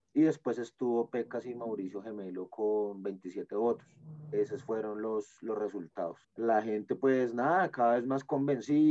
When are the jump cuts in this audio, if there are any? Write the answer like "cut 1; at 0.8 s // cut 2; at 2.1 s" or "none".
cut 1; at 6.2 s